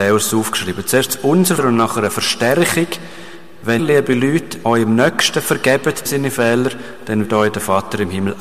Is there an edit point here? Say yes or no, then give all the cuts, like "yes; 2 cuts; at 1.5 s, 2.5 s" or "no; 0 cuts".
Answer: yes; 5 cuts; at 1.6 s, 3.8 s, 4.6 s, 6.1 s, 7.2 s